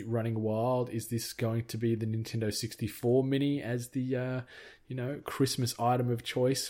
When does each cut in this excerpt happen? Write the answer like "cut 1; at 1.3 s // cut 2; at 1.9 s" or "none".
none